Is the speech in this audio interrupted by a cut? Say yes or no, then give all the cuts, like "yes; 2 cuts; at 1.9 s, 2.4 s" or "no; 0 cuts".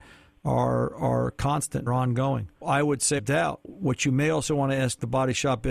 yes; 4 cuts; at 1.9 s, 2.6 s, 3.2 s, 3.6 s